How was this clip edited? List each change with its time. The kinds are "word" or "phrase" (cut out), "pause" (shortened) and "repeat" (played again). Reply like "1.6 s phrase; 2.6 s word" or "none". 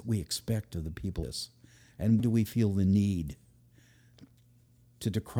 1.2 s word; 2.2 s word